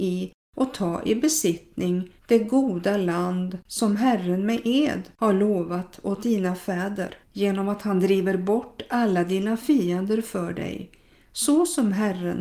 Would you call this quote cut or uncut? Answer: cut